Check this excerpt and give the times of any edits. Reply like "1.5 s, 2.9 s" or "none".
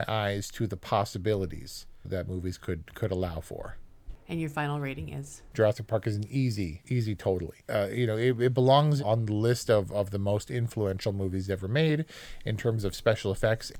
2.0 s